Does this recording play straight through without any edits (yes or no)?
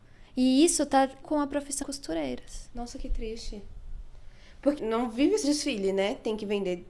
no